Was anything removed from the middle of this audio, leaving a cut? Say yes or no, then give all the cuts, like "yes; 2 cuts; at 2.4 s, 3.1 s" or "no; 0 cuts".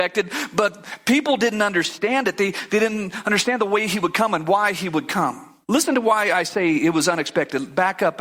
yes; 1 cut; at 5.6 s